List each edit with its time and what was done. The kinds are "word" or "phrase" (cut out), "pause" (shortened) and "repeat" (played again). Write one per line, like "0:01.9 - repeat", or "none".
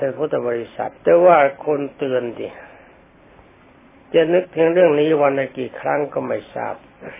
0:01.0 - pause